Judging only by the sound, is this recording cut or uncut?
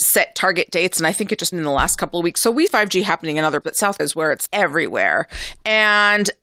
cut